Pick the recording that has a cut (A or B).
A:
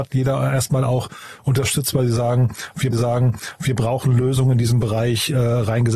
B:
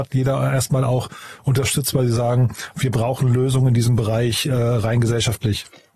A